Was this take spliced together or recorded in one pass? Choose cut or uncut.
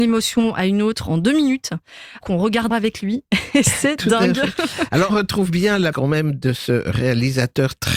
cut